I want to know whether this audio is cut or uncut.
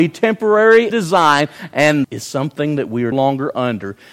cut